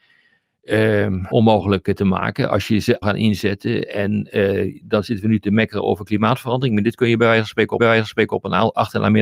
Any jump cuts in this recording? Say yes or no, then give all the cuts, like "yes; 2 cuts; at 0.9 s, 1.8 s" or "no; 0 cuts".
yes; 3 cuts; at 1.3 s, 3.0 s, 7.8 s